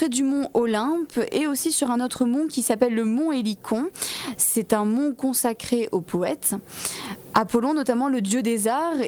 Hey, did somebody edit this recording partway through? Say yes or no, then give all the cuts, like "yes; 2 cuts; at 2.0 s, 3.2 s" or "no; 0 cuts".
no; 0 cuts